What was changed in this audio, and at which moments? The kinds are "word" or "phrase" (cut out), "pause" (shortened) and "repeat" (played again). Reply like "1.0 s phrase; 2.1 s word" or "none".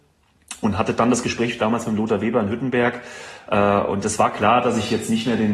none